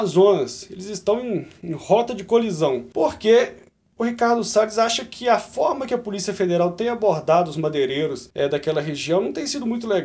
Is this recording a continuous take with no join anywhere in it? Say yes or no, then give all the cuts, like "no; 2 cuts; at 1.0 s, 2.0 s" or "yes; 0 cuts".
yes; 0 cuts